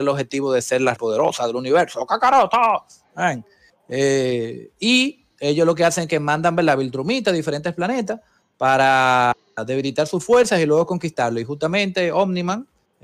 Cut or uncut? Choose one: cut